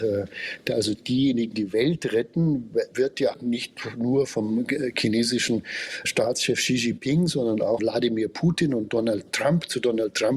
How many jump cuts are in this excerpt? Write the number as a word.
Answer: five